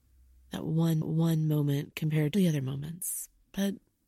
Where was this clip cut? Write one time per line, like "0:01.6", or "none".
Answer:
0:01.0
0:02.3

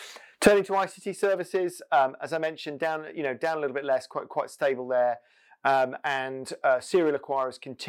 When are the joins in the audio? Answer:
none

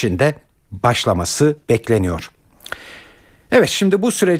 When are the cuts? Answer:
0:01.6

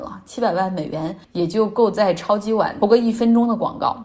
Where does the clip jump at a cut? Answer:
0:01.2

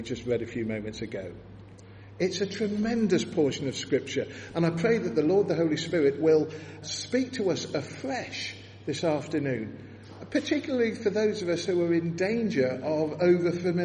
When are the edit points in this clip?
0:06.8

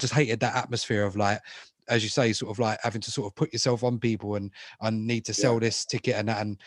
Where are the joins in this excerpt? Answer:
none

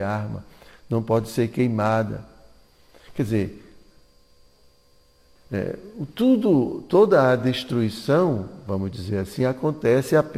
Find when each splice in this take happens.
none

